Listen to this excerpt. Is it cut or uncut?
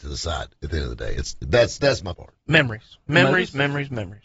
cut